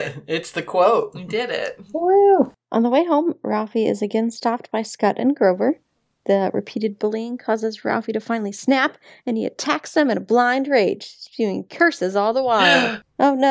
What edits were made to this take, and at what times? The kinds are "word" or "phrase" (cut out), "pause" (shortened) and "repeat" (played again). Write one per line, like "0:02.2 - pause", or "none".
none